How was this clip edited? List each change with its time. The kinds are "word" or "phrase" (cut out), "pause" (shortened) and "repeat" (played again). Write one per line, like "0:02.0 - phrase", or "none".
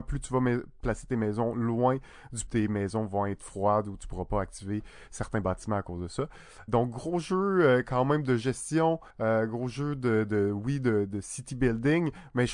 0:02.5 - phrase
0:06.7 - word
0:09.1 - pause